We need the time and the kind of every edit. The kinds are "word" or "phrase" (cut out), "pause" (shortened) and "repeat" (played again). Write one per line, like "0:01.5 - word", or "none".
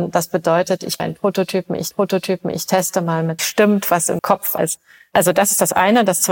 0:01.0 - word
0:01.9 - repeat
0:03.4 - phrase
0:04.2 - word
0:04.6 - phrase